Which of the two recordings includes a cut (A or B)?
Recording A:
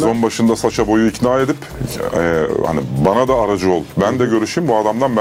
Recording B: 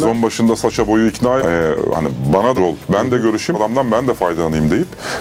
B